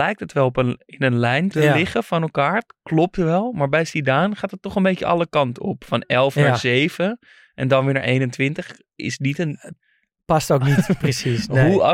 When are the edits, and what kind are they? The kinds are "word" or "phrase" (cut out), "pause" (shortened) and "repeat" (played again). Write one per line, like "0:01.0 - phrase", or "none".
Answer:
0:01.5 - word